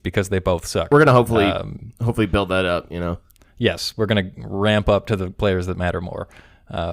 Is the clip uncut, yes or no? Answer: yes